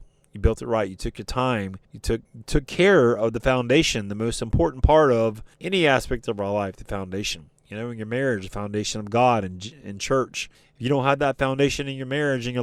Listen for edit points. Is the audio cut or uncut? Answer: cut